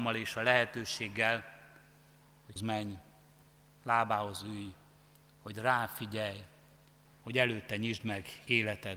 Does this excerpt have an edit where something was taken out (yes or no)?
yes